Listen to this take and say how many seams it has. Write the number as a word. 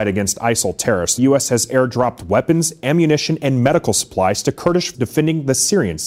two